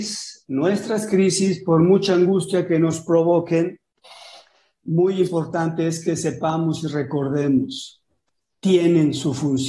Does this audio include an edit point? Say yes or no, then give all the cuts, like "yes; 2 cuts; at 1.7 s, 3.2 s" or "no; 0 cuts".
no; 0 cuts